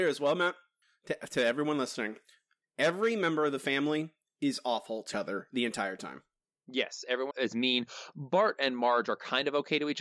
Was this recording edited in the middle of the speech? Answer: yes; 2 cuts; at 5.1 s, 7.3 s

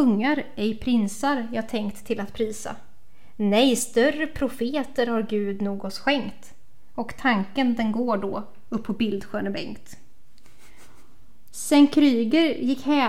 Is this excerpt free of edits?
yes; 0 cuts

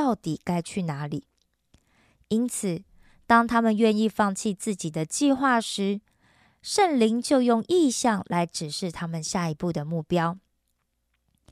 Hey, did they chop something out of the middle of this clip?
no; 0 cuts

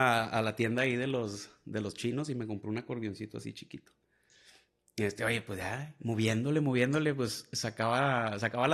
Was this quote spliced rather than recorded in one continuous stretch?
no; 0 cuts

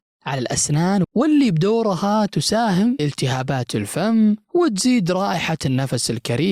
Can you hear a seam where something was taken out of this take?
yes; 2 cuts; at 1.0 s, 3.0 s

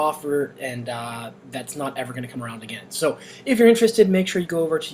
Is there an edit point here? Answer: no; 0 cuts

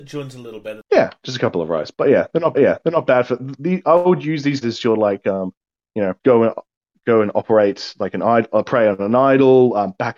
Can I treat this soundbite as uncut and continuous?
no; 3 cuts; at 2.5 s, 4.6 s, 6.2 s

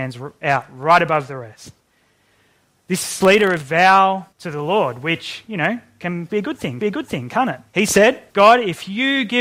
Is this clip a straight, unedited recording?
no; 7 cuts; at 3.2 s, 3.6 s, 4.3 s, 6.3 s, 6.8 s, 7.7 s, 8.3 s

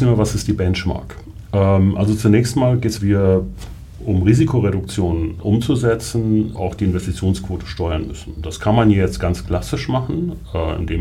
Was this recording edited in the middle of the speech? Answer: yes; 3 cuts; at 3.0 s, 5.4 s, 6.5 s

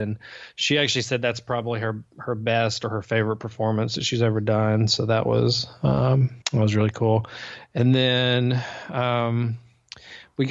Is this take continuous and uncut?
no; 1 cut; at 6.4 s

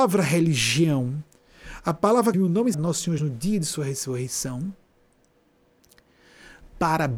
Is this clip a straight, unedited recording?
no; 3 cuts; at 2.3 s, 2.7 s, 3.2 s

